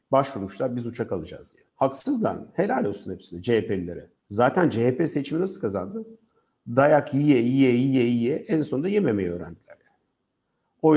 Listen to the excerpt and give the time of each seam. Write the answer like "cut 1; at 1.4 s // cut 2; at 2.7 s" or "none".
cut 1; at 1.7 s // cut 2; at 4.2 s